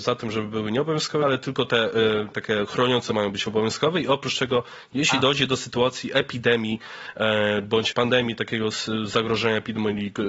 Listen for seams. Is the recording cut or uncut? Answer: cut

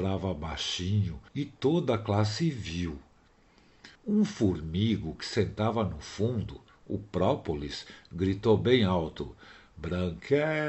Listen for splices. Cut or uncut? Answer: cut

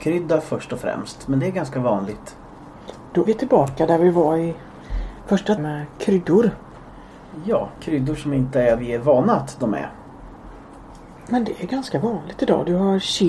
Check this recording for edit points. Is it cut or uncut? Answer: cut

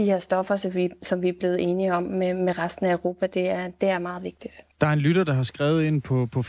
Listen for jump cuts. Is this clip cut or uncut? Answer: cut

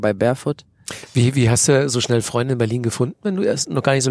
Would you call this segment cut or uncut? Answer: uncut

